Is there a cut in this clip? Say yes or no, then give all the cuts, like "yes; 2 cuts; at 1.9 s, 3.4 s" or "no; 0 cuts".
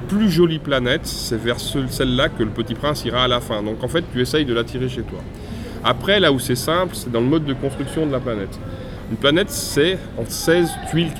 yes; 1 cut; at 10.3 s